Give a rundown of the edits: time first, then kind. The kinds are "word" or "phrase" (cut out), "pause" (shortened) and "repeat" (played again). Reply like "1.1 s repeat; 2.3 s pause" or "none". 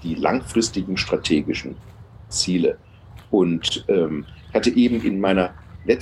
none